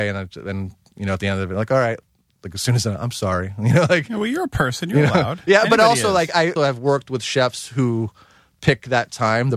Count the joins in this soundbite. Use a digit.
1